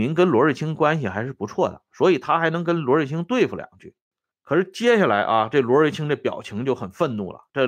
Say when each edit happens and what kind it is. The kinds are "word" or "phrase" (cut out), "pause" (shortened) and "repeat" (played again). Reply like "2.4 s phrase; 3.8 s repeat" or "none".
4.3 s pause

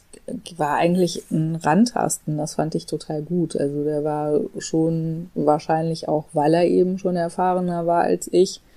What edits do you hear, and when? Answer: none

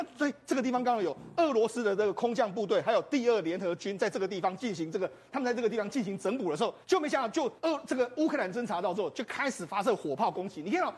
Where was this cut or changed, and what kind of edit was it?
6.8 s pause; 7.6 s pause

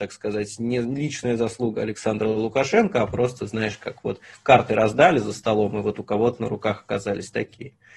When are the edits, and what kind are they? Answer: none

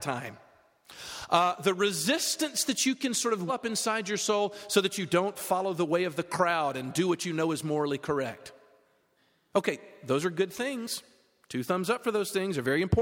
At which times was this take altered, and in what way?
1.6 s word; 3.5 s word

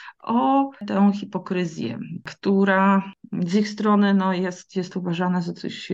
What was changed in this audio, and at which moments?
none

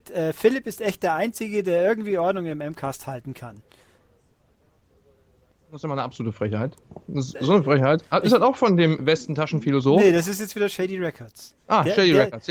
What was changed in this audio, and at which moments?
9.0 s word

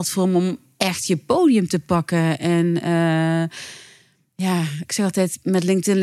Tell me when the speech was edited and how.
none

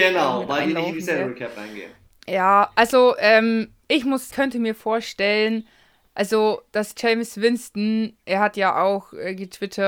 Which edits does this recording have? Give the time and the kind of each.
2.0 s pause; 4.3 s phrase; 8.2 s pause

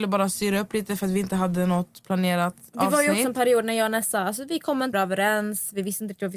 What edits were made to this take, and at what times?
4.9 s word

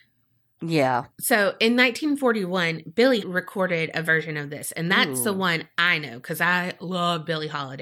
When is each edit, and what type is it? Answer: 1.1 s pause; 3.2 s word

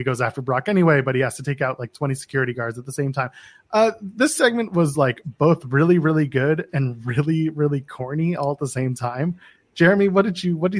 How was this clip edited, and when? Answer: none

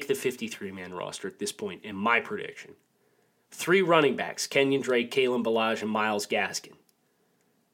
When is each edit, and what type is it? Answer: none

